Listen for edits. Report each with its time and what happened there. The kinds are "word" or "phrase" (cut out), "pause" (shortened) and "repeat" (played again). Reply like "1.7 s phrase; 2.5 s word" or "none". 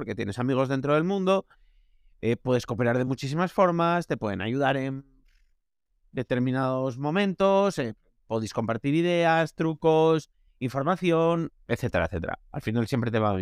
none